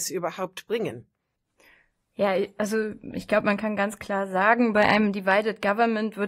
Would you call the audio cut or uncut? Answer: uncut